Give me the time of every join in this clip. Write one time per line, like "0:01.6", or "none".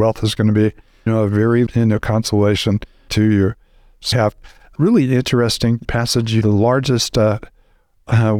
0:01.1
0:01.7
0:03.1
0:04.1
0:04.8
0:05.8
0:06.4